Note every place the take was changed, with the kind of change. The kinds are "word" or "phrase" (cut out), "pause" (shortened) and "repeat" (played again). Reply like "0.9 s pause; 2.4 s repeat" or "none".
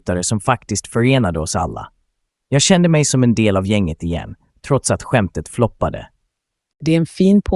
none